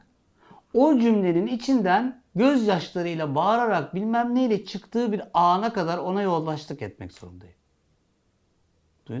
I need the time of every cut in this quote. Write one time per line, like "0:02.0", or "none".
none